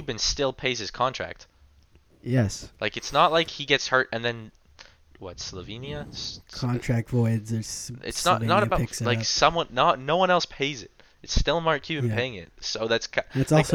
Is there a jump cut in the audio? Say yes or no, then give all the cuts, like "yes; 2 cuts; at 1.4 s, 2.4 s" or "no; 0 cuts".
no; 0 cuts